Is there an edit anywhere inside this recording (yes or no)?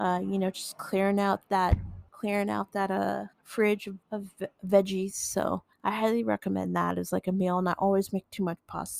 yes